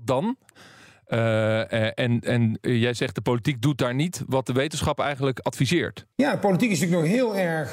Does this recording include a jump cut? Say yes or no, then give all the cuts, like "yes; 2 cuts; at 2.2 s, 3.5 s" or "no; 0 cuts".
yes; 1 cut; at 6.1 s